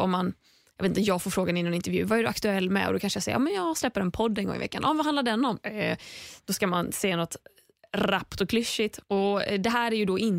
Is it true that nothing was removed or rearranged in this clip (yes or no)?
no